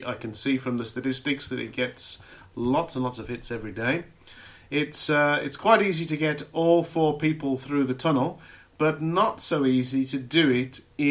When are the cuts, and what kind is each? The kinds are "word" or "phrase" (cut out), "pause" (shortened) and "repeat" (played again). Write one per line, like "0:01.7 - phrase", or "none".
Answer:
none